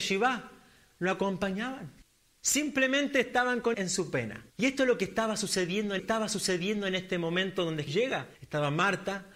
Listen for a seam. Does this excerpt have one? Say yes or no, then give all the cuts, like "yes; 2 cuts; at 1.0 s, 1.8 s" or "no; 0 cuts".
yes; 6 cuts; at 2.0 s, 3.7 s, 4.5 s, 6.0 s, 7.9 s, 8.3 s